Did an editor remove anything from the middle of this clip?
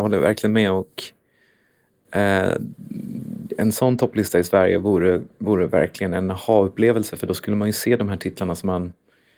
no; 0 cuts

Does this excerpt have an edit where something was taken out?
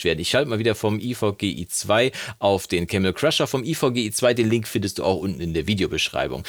no; 0 cuts

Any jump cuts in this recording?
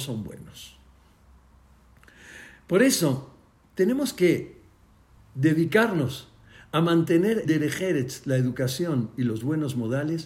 yes; 2 cuts; at 5.2 s, 7.4 s

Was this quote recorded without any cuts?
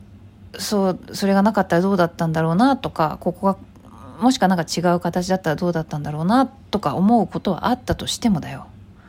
yes; 0 cuts

